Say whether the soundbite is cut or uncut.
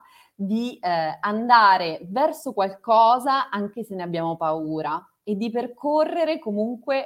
uncut